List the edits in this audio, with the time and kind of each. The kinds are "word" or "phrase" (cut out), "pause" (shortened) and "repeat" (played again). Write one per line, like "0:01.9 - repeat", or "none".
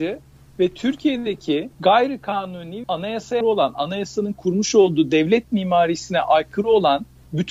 0:01.7 - pause
0:02.8 - word
0:03.4 - word